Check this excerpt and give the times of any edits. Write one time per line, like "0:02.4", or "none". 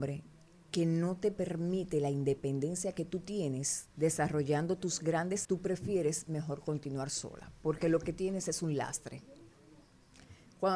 0:05.4